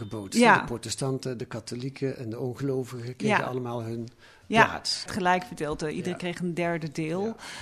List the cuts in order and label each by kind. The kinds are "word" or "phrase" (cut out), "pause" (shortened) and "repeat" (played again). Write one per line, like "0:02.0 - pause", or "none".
0:05.1 - phrase